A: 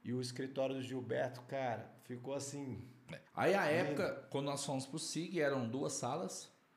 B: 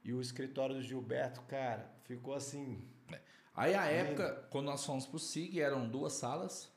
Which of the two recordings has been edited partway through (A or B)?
A